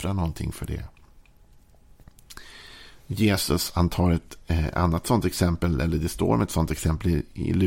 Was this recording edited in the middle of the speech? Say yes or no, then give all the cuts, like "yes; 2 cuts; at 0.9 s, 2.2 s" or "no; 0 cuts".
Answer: no; 0 cuts